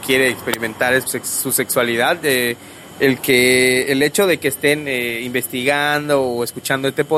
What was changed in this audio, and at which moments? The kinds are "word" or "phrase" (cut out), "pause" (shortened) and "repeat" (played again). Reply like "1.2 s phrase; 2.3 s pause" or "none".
1.1 s phrase